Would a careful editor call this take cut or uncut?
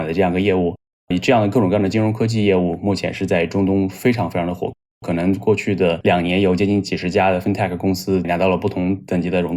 uncut